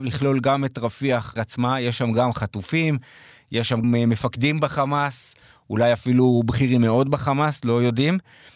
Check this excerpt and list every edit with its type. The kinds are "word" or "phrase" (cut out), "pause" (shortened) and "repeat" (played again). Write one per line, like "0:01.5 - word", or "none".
0:01.4 - word
0:03.8 - word